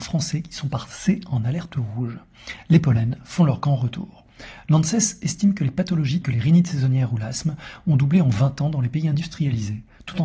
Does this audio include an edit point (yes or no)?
yes